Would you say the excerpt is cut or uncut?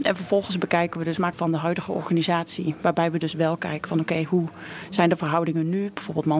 cut